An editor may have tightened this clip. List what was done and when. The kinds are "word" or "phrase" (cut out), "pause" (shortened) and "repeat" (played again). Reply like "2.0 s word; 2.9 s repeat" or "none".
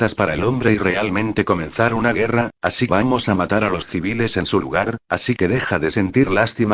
2.9 s phrase

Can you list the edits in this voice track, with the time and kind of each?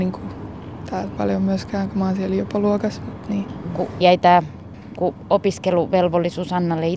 1.2 s word; 1.9 s word; 4.0 s word; 5.0 s word

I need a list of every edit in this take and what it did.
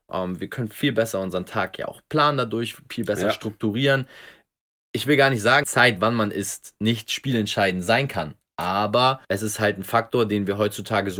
5.6 s phrase; 9.2 s pause

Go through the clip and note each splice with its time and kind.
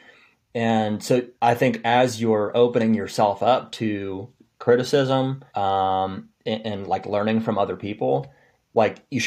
1.3 s pause; 5.5 s pause

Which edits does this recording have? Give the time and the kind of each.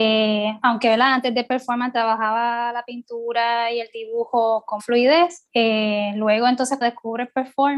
4.8 s word; 5.5 s pause; 6.8 s word

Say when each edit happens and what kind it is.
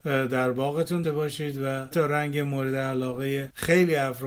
1.0 s word; 1.9 s word

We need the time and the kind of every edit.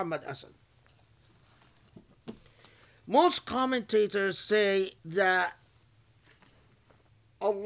5.0 s pause

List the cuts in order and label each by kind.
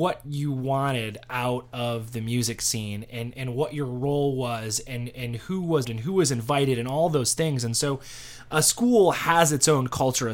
5.8 s word

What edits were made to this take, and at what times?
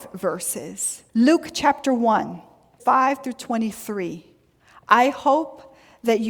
1.1 s pause; 2.8 s word; 4.6 s pause

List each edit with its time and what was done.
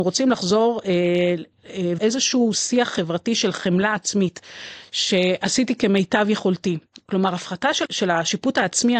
2.0 s word; 7.8 s word

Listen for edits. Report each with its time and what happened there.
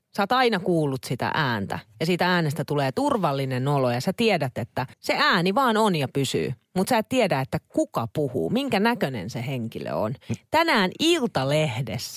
4.9 s pause

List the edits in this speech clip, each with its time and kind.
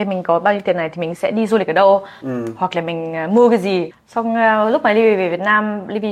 none

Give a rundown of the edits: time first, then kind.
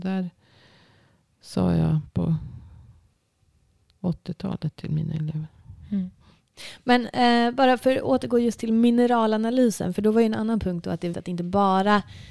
11.1 s word

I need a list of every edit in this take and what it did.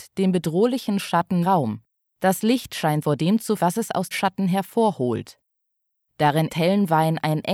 1.4 s word; 3.0 s word; 3.6 s word; 4.1 s word; 6.5 s word

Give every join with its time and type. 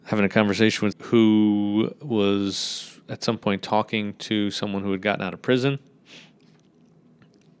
0.9 s word

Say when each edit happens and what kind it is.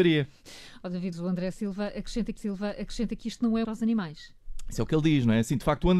1.1 s word; 2.4 s repeat; 3.6 s phrase

